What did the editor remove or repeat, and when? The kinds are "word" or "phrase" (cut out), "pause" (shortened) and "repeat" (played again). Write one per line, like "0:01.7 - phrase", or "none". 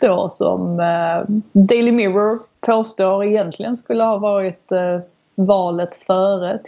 none